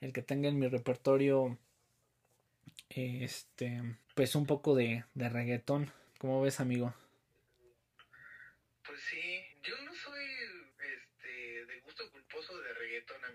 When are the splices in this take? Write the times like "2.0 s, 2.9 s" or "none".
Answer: 4.0 s, 6.1 s, 9.5 s, 10.7 s